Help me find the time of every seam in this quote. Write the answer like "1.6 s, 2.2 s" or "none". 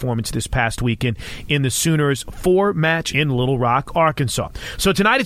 3.1 s